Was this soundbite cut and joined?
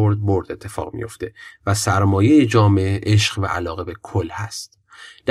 no; 0 cuts

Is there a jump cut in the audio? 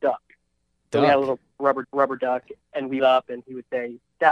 yes; 2 cuts; at 1.8 s, 3.0 s

